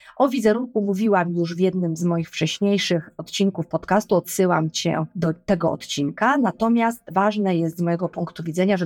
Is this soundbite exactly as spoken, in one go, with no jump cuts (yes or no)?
yes